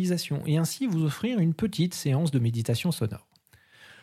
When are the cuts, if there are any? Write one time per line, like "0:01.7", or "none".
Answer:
none

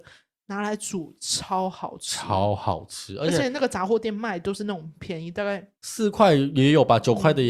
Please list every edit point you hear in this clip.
0:05.8

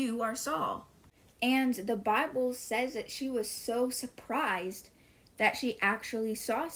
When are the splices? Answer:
none

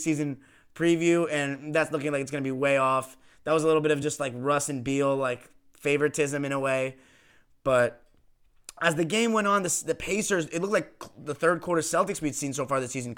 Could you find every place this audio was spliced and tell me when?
none

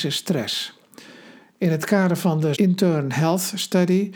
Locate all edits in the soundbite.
0:02.5

